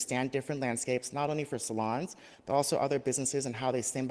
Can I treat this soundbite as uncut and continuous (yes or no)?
yes